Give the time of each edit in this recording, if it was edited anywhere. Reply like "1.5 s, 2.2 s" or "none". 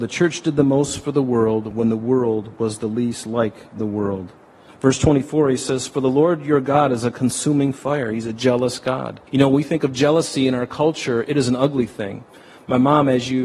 4.7 s, 9.3 s